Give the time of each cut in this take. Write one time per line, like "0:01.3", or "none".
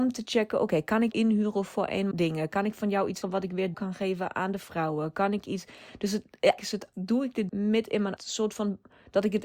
0:01.1
0:02.1
0:03.2
0:03.7
0:06.6
0:06.9
0:07.5
0:08.2

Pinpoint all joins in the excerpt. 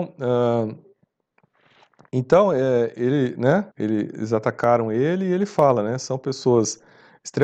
0:03.7

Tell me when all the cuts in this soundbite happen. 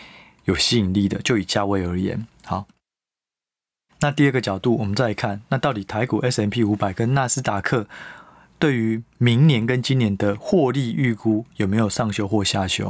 none

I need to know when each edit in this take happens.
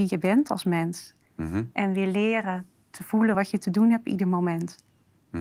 none

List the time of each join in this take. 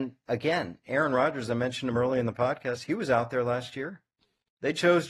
none

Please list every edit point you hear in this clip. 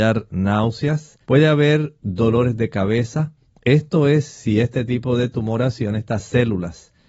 0:01.2
0:03.4

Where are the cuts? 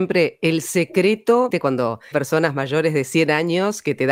0:01.5
0:02.1

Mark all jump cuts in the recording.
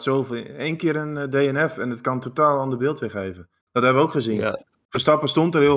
none

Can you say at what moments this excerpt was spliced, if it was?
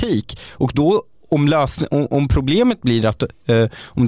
none

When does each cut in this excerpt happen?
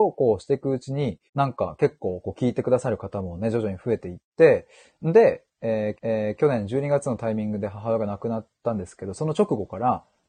0:01.3
0:06.0

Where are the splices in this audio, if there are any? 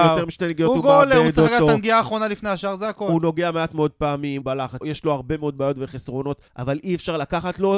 0:04.4
0:04.8
0:06.5

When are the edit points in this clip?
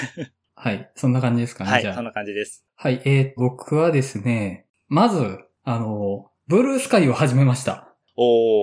0:03.4

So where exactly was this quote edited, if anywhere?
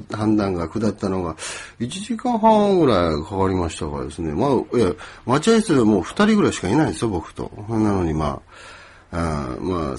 none

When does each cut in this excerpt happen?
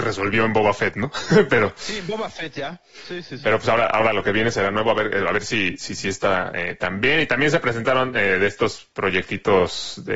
none

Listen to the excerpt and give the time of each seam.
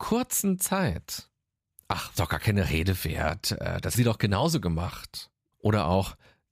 0:02.1
0:03.9

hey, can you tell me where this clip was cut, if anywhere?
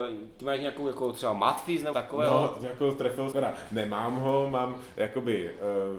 0:01.9
0:03.3

